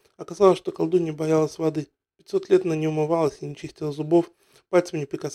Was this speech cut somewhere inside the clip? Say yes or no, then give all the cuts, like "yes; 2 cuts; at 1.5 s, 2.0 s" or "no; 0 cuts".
no; 0 cuts